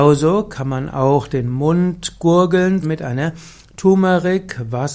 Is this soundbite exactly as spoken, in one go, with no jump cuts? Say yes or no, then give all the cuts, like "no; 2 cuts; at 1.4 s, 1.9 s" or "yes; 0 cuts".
no; 1 cut; at 2.8 s